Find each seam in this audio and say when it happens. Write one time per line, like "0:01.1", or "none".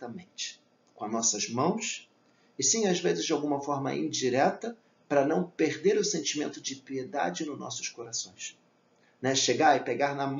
none